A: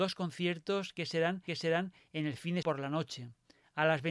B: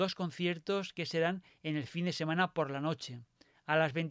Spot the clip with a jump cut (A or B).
A